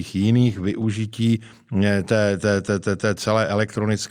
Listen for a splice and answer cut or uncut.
uncut